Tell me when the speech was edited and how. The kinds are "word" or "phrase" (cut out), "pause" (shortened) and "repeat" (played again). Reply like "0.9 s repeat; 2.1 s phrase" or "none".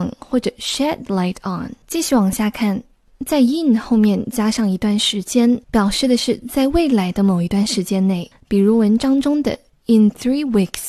1.8 s pause; 5.6 s pause